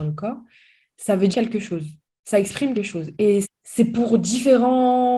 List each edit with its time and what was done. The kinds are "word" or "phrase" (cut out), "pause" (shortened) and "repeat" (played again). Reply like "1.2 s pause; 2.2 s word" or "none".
1.3 s word; 2.1 s pause; 2.7 s word; 3.4 s word